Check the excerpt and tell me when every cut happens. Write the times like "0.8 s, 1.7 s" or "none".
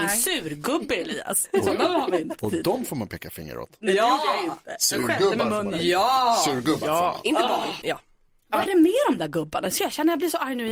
7.8 s, 8.7 s